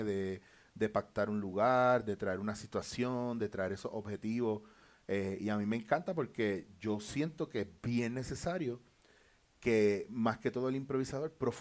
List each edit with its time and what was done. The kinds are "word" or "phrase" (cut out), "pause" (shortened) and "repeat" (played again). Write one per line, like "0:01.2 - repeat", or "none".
none